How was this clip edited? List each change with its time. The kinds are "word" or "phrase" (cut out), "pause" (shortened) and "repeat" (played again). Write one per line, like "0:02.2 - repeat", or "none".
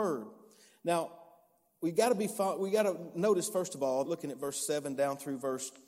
0:04.0 - phrase